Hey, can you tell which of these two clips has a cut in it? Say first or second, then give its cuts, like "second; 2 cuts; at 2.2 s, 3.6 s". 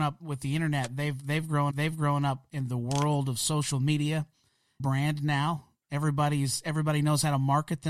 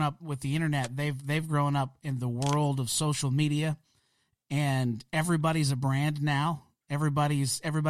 first; 2 cuts; at 1.7 s, 4.8 s